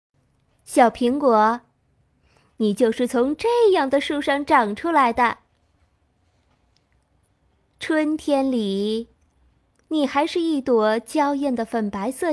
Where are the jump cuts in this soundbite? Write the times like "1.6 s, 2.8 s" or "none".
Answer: none